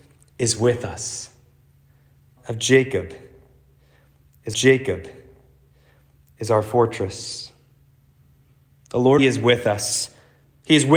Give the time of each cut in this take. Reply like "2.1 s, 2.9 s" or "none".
2.4 s, 4.5 s, 9.2 s

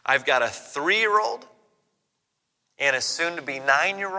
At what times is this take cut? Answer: none

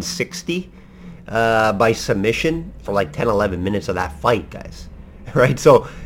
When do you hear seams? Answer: 2.8 s

